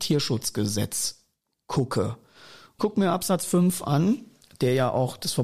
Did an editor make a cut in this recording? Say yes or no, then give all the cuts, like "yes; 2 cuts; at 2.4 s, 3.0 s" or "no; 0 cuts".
yes; 1 cut; at 2.8 s